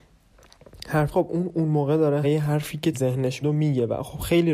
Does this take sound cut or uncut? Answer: cut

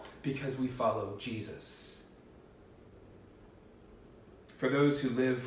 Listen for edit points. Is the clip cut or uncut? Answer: uncut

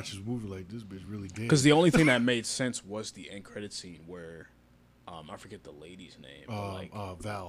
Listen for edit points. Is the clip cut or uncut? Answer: uncut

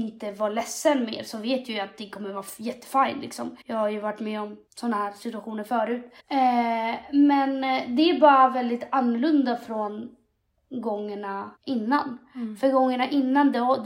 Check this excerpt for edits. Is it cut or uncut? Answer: cut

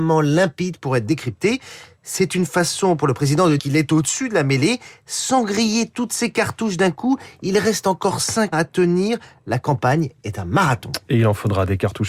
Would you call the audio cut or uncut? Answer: cut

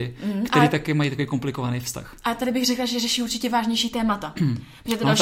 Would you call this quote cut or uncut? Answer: uncut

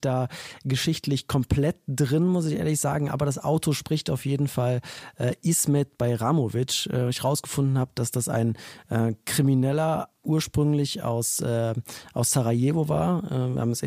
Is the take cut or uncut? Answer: uncut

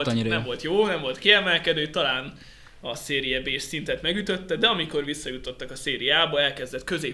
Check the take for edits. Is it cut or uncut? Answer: uncut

